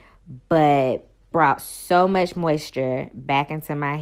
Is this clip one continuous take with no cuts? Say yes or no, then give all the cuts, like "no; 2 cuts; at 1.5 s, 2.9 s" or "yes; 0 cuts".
no; 1 cut; at 1.3 s